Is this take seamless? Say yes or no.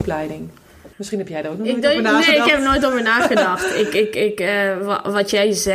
no